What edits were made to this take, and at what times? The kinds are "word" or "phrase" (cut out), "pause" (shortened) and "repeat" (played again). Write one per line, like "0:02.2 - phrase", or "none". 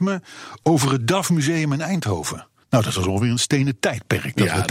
0:02.6 - pause